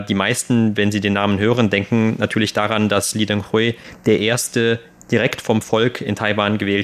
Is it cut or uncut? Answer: uncut